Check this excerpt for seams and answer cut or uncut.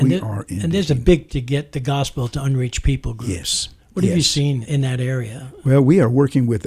cut